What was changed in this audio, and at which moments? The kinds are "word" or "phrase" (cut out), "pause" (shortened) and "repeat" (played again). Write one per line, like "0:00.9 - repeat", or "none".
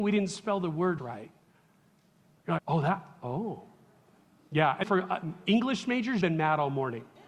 0:01.0 - word
0:02.6 - word
0:04.8 - word
0:06.2 - word